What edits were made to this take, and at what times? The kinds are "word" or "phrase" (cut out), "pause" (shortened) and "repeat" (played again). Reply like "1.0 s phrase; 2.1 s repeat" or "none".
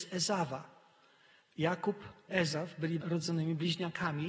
2.3 s word; 3.0 s word